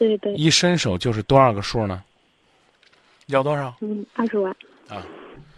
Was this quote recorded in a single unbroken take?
no; 2 cuts; at 2.7 s, 4.1 s

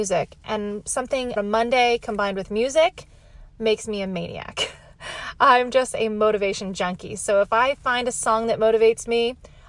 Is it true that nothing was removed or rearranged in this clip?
no; 1 cut; at 1.4 s

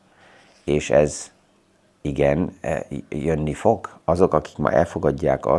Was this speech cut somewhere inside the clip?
no; 0 cuts

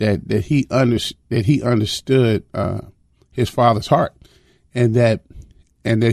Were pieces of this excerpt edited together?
no; 0 cuts

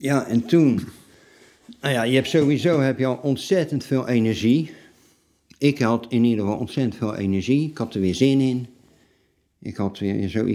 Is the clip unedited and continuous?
yes; 0 cuts

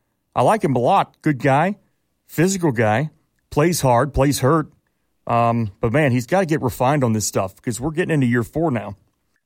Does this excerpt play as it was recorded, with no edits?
yes; 0 cuts

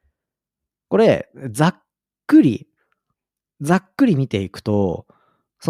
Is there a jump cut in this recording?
no; 0 cuts

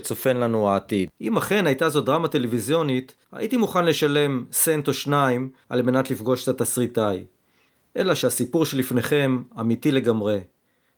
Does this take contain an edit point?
yes; 1 cut; at 3.2 s

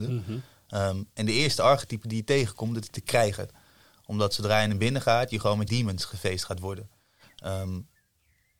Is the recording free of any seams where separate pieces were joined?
no; 1 cut; at 5.7 s

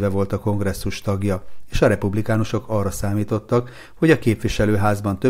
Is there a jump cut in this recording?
no; 0 cuts

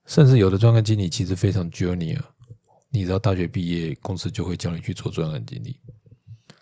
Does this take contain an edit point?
no; 0 cuts

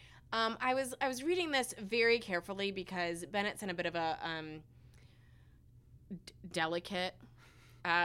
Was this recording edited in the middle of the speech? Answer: no; 0 cuts

